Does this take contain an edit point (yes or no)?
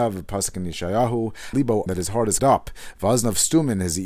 yes